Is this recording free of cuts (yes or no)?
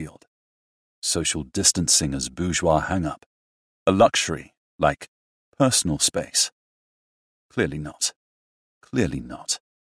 yes